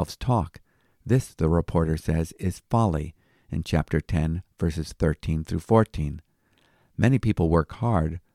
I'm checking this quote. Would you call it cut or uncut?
uncut